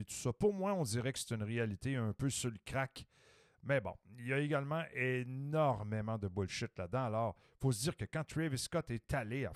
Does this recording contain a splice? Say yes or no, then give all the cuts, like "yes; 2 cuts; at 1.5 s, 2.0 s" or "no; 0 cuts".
no; 0 cuts